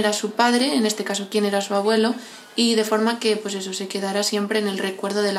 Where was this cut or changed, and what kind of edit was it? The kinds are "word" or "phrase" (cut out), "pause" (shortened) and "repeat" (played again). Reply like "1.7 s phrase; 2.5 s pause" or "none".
none